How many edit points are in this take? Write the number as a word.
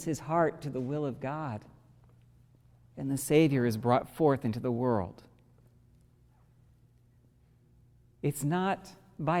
zero